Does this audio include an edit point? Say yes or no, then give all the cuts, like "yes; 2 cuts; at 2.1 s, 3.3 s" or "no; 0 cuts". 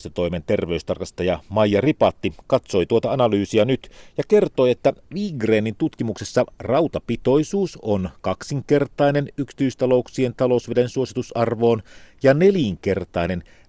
no; 0 cuts